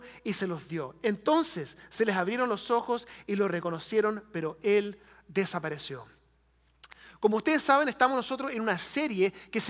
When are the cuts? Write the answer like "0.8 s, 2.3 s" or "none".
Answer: none